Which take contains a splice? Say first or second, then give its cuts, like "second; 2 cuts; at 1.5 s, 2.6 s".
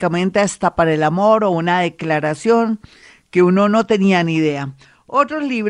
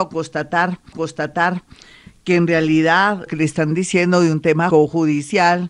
second; 3 cuts; at 0.9 s, 3.3 s, 4.7 s